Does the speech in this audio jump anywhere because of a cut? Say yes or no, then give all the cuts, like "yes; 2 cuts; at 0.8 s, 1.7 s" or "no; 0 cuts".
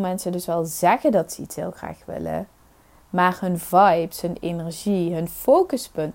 no; 0 cuts